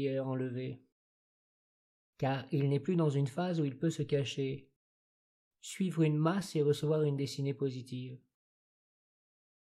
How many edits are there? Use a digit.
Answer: 0